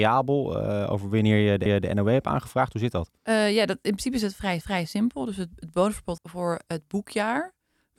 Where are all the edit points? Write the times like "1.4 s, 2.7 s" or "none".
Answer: 1.7 s, 3.2 s, 4.6 s, 6.2 s